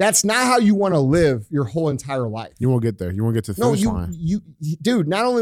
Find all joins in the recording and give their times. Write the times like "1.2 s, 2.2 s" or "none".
none